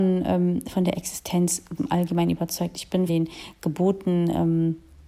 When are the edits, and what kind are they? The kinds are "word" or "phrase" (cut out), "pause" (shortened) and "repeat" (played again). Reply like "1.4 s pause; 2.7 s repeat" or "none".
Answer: 1.8 s word; 3.1 s word